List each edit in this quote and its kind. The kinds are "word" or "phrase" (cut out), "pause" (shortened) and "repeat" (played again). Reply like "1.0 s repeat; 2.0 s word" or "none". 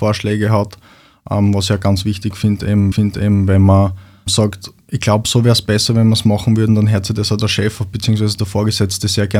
2.9 s repeat